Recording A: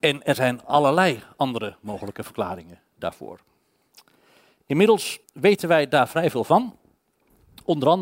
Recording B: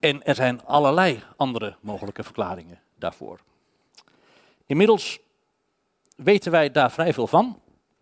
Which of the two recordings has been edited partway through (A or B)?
A